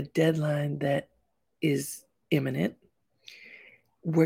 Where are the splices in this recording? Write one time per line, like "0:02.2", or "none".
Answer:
none